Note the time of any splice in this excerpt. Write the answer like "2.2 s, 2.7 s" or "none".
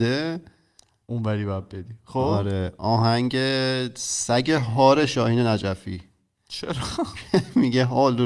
none

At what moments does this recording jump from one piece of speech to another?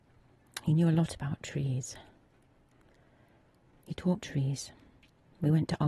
4.2 s

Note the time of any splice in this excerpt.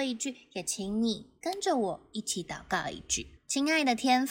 3.4 s

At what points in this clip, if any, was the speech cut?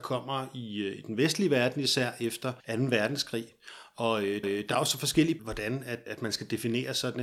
2.6 s, 4.4 s, 5.4 s, 6.1 s

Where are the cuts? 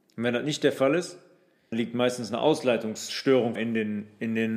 1.7 s, 3.6 s

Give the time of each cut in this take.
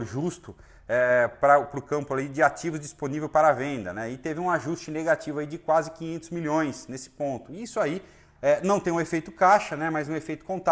none

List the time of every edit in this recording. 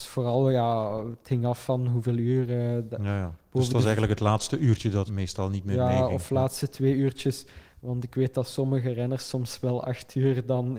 5.1 s

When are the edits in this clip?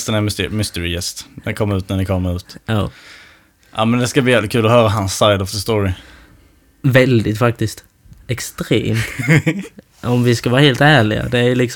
none

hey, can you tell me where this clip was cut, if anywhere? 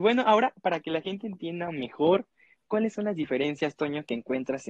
none

